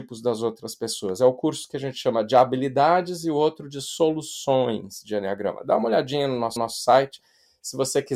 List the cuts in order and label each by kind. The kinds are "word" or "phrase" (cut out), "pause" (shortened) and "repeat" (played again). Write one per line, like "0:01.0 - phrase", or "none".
0:06.6 - repeat